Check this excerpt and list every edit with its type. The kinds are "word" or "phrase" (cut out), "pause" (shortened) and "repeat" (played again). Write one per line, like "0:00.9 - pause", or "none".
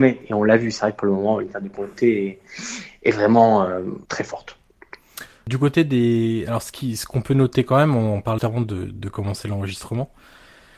0:04.1 - pause
0:08.4 - word